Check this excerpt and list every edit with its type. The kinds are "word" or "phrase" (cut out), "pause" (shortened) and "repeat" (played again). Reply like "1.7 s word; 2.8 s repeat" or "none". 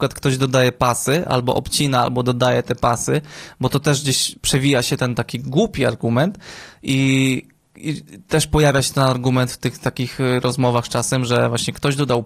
none